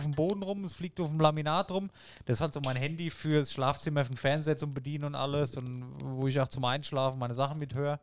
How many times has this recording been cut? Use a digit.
0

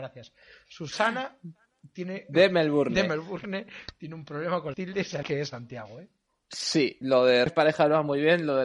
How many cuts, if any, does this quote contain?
4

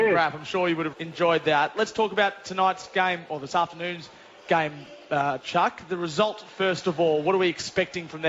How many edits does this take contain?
1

